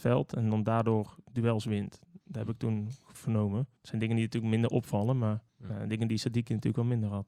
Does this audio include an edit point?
yes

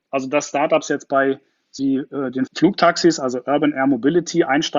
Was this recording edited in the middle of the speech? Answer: yes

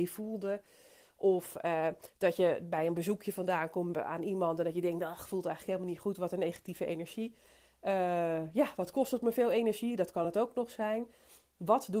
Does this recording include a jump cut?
no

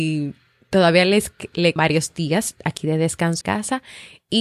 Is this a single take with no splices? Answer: no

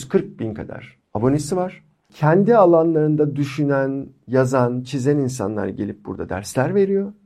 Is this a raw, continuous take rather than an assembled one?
yes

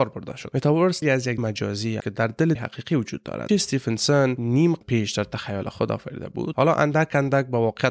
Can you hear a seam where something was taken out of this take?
yes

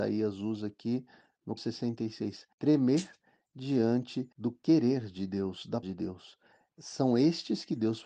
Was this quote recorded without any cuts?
no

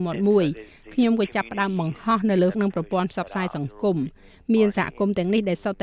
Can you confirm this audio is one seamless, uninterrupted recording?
no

